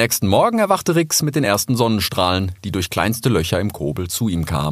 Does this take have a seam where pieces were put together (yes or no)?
no